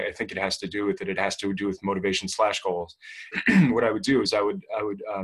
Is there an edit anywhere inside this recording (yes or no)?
yes